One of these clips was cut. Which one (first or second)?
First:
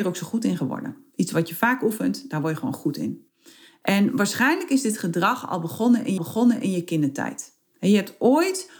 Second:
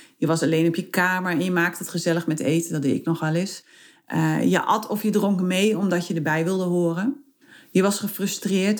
first